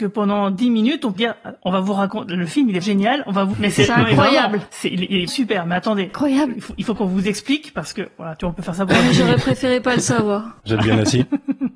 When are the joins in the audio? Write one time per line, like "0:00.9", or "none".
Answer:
0:01.2
0:02.8
0:03.5
0:05.3
0:07.0